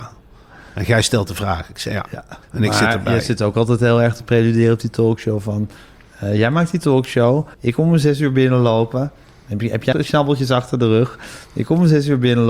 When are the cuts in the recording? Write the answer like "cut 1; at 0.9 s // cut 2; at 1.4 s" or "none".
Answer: cut 1; at 2.4 s // cut 2; at 7.5 s // cut 3; at 9.9 s